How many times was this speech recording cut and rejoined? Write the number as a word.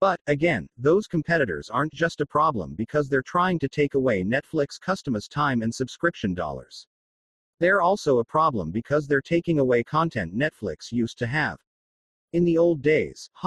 zero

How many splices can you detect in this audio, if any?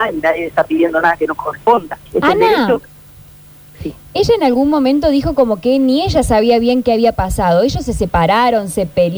one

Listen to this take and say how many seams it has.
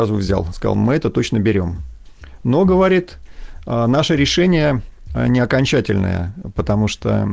zero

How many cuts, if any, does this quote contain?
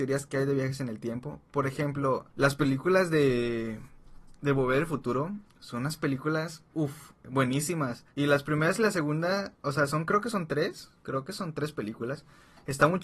four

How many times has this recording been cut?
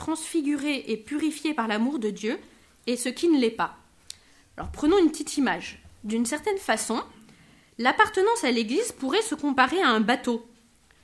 zero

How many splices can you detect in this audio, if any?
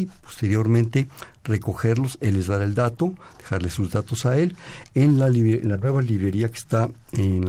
zero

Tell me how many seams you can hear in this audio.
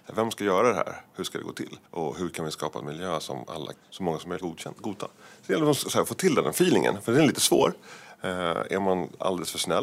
three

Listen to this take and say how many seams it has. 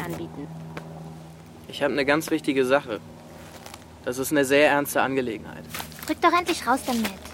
zero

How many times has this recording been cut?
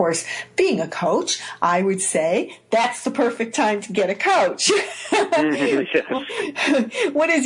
zero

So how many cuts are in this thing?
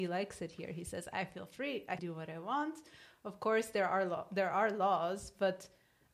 one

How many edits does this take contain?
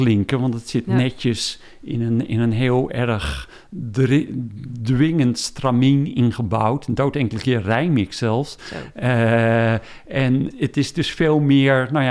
one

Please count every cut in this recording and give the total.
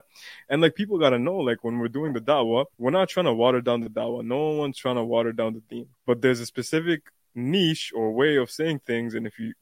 two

